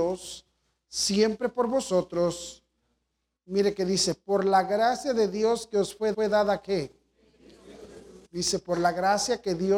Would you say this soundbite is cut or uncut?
cut